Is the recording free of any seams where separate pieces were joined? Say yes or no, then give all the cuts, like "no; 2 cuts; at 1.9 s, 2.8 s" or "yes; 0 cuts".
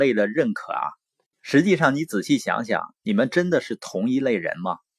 yes; 0 cuts